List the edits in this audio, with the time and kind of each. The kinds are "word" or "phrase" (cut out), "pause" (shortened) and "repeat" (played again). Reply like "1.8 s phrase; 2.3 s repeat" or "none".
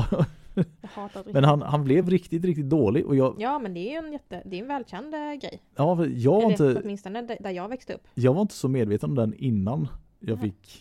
none